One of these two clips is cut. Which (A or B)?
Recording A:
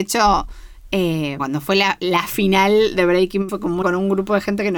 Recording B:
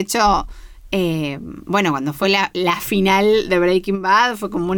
A